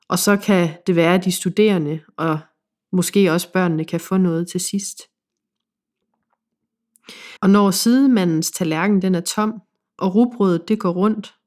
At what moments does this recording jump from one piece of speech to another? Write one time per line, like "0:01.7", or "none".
0:07.4